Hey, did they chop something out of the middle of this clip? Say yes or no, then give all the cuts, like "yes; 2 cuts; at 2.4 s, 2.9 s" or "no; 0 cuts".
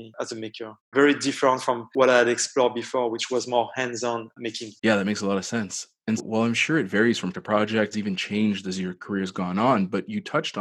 yes; 4 cuts; at 4.8 s, 6.2 s, 7.3 s, 7.9 s